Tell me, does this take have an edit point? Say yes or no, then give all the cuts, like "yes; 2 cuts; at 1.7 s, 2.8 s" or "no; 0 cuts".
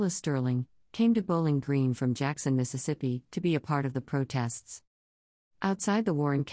no; 0 cuts